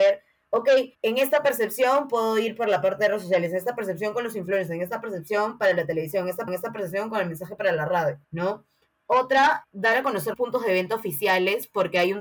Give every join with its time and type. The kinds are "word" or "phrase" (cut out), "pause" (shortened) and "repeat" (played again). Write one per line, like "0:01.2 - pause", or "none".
0:00.9 - pause
0:06.5 - repeat
0:08.2 - pause
0:09.6 - word
0:10.3 - word